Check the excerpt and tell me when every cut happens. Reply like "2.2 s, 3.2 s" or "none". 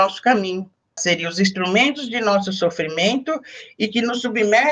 1.0 s